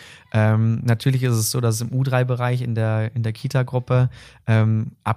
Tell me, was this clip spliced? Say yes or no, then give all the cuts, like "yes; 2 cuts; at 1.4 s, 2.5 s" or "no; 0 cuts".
no; 0 cuts